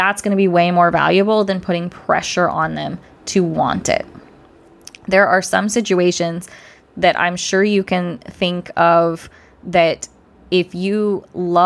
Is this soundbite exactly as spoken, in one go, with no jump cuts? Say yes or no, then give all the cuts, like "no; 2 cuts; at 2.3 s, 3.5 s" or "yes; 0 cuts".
yes; 0 cuts